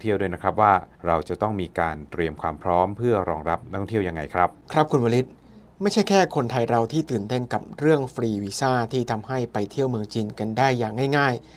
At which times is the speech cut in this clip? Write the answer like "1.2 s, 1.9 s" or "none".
0.9 s, 4.6 s